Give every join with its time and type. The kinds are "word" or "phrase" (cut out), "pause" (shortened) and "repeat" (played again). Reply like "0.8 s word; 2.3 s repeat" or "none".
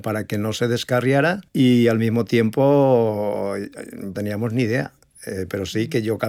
1.5 s pause; 4.1 s phrase